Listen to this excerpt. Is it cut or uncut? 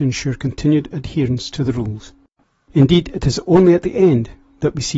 uncut